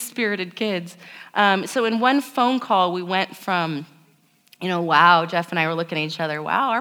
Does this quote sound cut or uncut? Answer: uncut